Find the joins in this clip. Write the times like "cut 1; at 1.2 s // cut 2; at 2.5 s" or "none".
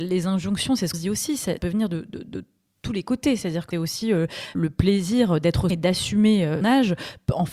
cut 1; at 0.9 s // cut 2; at 1.6 s // cut 3; at 3.7 s // cut 4; at 4.5 s // cut 5; at 5.7 s // cut 6; at 6.6 s